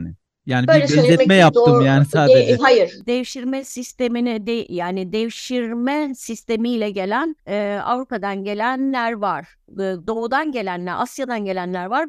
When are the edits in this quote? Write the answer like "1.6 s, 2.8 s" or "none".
none